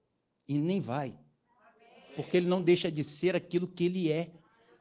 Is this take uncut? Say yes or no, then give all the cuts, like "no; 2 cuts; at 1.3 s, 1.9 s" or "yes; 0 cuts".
yes; 0 cuts